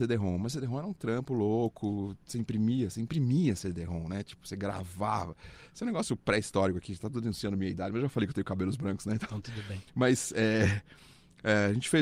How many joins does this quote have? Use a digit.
0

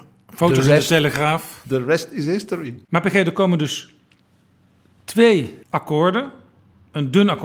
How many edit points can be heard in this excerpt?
2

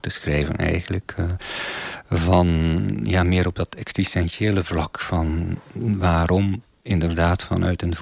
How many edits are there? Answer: 0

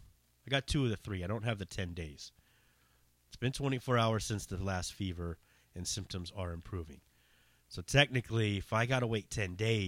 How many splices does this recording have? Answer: 0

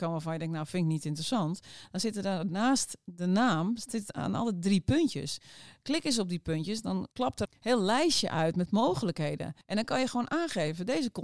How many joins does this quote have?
2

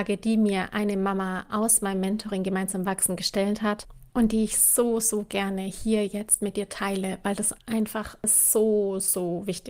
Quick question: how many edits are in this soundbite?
2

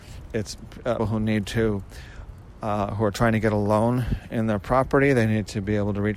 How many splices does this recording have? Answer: 1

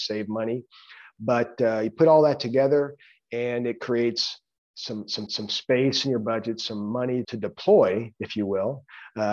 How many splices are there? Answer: 2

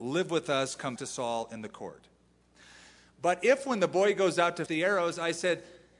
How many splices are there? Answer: 2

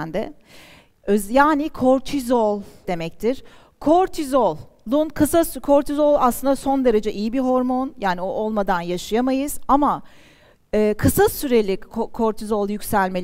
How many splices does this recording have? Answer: 1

